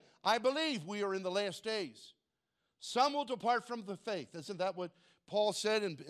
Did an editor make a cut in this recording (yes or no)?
no